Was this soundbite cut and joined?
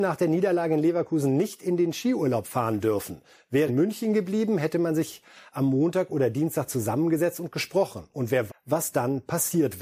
yes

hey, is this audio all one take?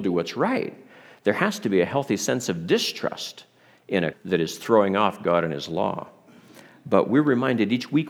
no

